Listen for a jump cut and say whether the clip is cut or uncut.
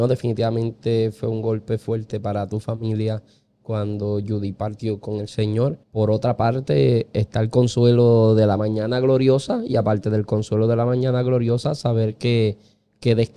cut